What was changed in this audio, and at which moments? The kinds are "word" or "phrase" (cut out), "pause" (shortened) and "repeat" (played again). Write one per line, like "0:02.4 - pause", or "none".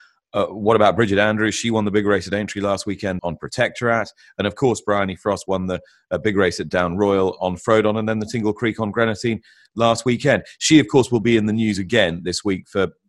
0:03.2 - word
0:07.4 - word